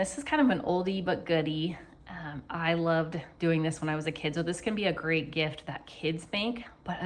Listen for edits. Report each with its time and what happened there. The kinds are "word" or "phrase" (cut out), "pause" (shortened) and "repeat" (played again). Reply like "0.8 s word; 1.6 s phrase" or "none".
none